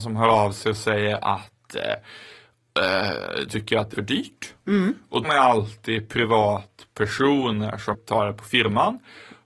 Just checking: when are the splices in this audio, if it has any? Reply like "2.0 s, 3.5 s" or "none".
3.5 s, 3.9 s, 5.2 s, 7.9 s